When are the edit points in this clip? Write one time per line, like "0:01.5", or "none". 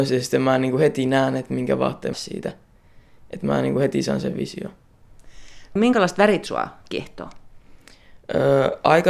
0:02.1